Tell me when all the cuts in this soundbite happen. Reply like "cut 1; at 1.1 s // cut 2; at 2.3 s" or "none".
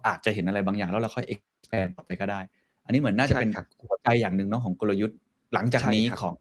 none